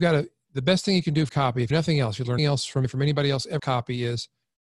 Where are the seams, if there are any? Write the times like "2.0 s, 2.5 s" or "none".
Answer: 1.3 s, 1.7 s, 2.4 s, 2.8 s, 3.6 s